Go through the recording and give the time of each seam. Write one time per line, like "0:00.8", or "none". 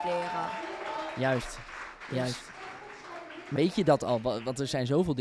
0:03.5